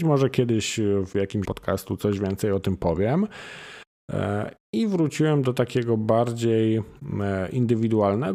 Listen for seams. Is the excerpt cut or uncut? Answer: cut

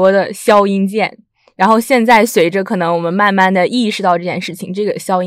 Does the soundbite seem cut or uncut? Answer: uncut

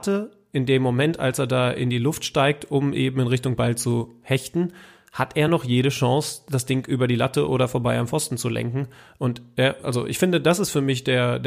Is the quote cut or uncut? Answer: uncut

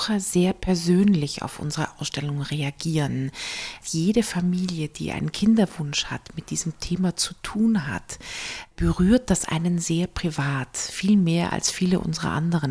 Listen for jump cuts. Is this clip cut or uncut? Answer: uncut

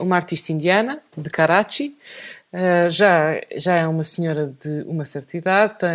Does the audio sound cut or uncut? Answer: uncut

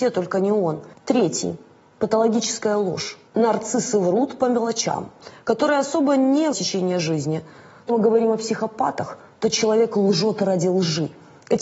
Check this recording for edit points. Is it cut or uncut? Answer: cut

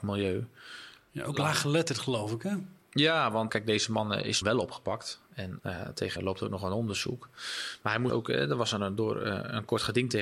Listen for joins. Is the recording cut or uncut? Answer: cut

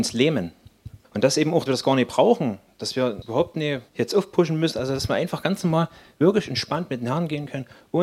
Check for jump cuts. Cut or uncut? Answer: cut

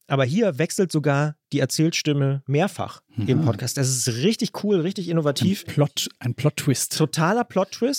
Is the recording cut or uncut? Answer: uncut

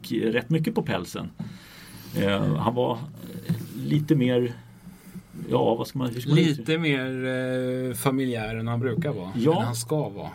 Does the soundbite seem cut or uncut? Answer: uncut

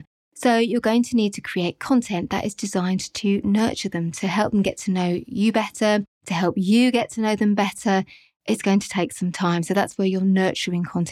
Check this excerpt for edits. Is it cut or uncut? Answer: uncut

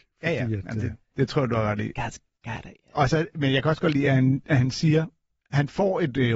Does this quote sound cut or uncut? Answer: uncut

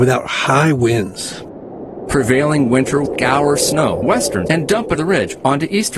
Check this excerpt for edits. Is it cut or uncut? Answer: cut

